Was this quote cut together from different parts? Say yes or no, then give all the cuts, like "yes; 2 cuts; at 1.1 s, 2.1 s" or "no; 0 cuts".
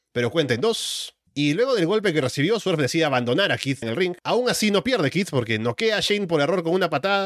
yes; 3 cuts; at 1.3 s, 3.8 s, 4.2 s